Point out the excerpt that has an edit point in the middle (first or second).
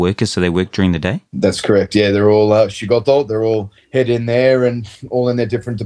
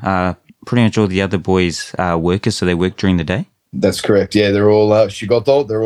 first